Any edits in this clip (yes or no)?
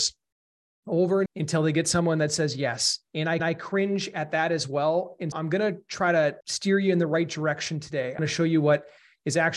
yes